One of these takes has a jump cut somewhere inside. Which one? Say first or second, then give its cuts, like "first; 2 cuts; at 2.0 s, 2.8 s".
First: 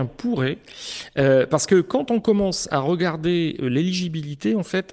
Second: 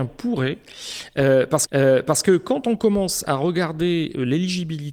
second; 1 cut; at 1.7 s